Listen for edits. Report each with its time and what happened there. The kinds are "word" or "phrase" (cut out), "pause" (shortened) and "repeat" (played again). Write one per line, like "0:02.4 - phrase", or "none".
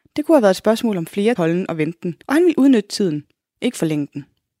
0:01.4 - word
0:02.2 - pause